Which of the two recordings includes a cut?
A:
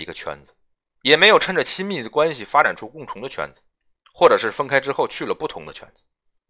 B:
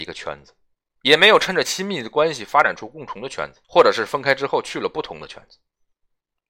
B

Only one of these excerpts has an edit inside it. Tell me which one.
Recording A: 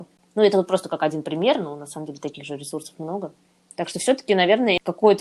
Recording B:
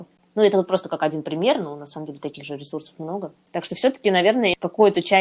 B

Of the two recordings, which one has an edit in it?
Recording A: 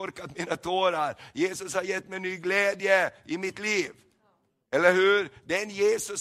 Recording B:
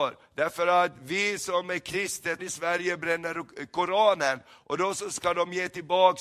B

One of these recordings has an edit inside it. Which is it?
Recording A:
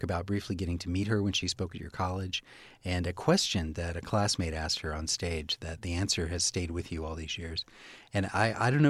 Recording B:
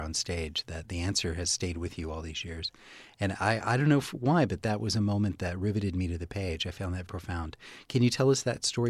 B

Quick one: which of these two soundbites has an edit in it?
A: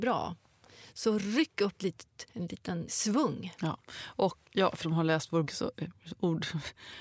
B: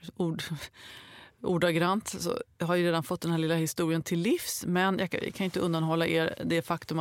A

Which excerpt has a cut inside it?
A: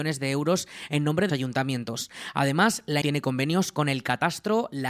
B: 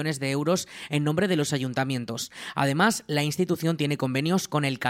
A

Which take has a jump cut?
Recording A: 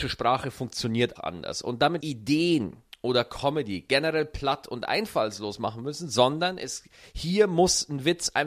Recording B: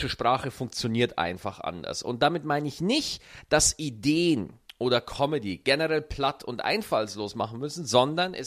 A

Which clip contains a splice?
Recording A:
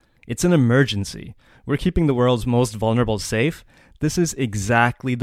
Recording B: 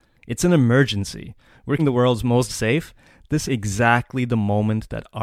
B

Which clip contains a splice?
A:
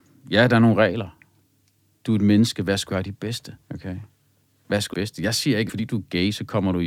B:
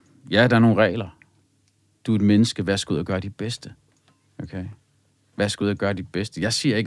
A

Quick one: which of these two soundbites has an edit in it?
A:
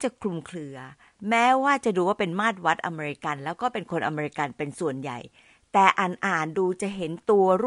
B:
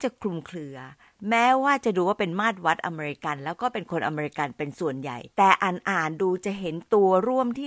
B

